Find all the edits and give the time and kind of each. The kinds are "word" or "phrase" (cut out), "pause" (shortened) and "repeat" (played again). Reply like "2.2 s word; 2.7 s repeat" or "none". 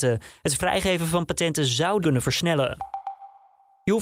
2.0 s word